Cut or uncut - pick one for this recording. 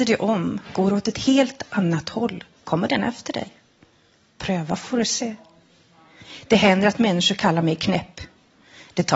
cut